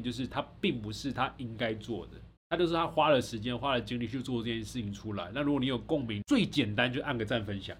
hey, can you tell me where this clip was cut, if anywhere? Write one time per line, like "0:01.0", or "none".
0:02.4
0:06.2

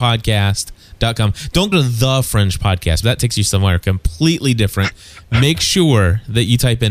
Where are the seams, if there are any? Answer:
0:01.7
0:03.0

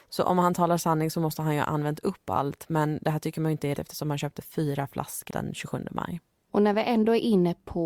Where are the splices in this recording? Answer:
0:03.8
0:05.3

